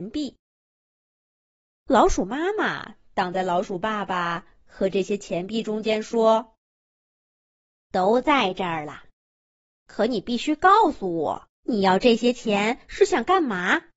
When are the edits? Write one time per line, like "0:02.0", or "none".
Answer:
0:11.6